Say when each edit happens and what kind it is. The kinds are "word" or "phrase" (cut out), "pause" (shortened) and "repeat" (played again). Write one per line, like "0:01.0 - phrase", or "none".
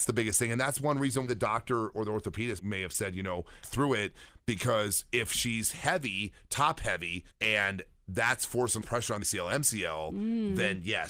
0:01.3 - word
0:02.6 - word
0:03.6 - phrase
0:07.3 - pause
0:08.8 - phrase
0:09.2 - word